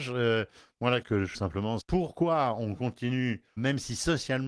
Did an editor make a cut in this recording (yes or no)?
yes